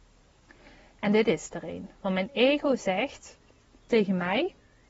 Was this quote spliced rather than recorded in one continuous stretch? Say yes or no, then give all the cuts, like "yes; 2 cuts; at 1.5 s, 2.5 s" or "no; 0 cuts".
no; 0 cuts